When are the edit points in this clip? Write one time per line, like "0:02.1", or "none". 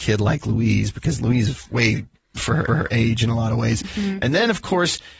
0:02.4
0:02.7